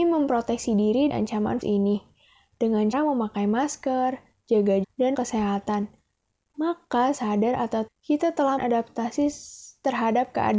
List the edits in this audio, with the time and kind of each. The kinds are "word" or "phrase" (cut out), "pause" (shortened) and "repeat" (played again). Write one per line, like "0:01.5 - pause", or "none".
0:01.1 - word
0:01.6 - word
0:02.9 - word
0:04.8 - word
0:05.1 - word
0:07.1 - word
0:07.9 - word
0:08.6 - word

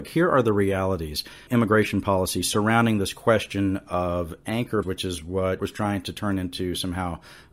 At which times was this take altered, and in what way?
0:01.5 - word
0:04.8 - word
0:05.6 - word

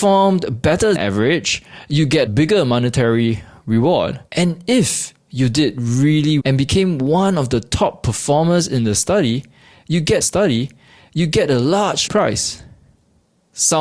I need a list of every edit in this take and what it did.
0:00.9 - word
0:02.3 - word
0:04.3 - pause
0:06.4 - word
0:10.2 - repeat
0:12.1 - word

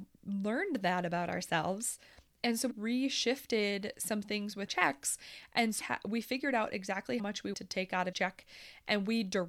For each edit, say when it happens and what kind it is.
0:02.7 - word
0:04.7 - word
0:05.8 - word
0:07.2 - word
0:07.5 - word
0:08.1 - word

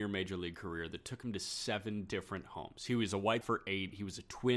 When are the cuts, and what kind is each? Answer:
0:03.4 - word

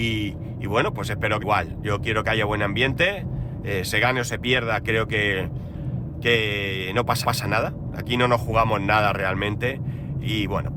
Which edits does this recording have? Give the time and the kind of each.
0:01.4 - phrase
0:07.2 - repeat

